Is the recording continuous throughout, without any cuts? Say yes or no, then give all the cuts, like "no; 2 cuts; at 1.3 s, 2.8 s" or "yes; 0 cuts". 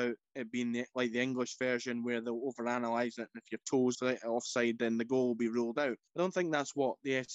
no; 2 cuts; at 3.9 s, 6.1 s